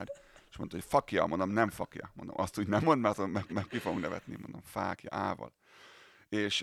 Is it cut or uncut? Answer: cut